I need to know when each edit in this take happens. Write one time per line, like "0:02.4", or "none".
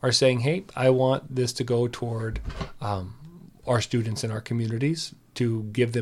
none